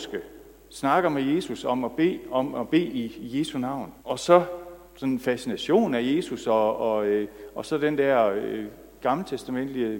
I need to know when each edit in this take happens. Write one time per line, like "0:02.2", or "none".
0:04.0
0:04.9